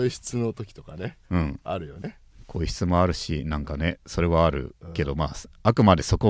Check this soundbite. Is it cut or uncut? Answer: uncut